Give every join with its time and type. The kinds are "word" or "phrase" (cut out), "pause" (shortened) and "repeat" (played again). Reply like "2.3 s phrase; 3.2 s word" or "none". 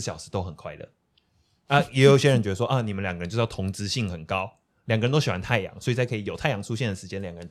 none